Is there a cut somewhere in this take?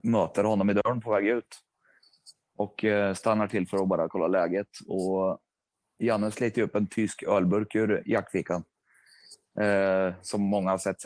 no; 0 cuts

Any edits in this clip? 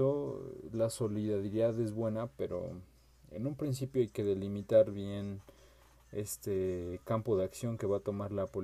no; 0 cuts

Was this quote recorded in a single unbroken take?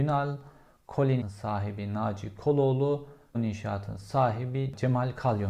no; 2 cuts; at 1.2 s, 3.3 s

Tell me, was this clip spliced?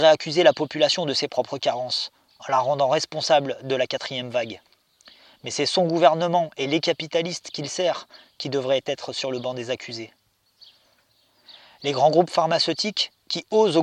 no; 0 cuts

